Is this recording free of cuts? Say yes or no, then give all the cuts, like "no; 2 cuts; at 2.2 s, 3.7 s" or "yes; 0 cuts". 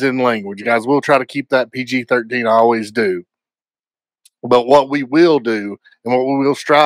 yes; 0 cuts